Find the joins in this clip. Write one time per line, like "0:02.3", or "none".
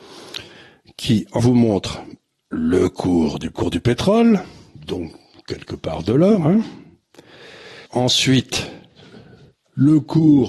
0:01.4
0:03.5
0:07.9